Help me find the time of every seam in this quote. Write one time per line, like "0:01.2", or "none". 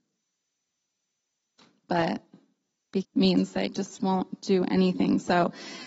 0:03.0
0:03.7